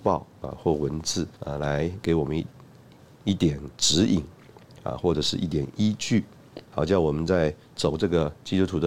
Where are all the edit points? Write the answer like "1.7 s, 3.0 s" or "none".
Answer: 1.4 s, 6.7 s